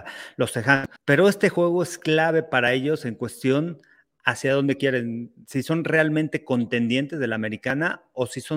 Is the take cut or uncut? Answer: cut